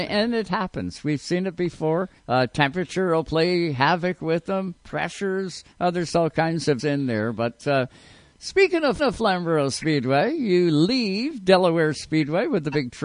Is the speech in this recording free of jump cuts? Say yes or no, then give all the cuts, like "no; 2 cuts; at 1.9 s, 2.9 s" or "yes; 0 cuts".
no; 4 cuts; at 2.2 s, 5.7 s, 6.8 s, 9.0 s